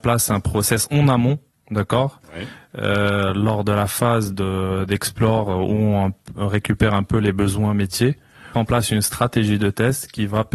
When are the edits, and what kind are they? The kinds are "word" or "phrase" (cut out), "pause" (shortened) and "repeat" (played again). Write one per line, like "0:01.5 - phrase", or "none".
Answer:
0:08.5 - phrase